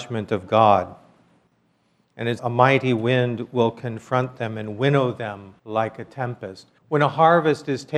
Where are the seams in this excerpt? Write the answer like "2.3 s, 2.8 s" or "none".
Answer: 2.4 s, 5.6 s, 6.8 s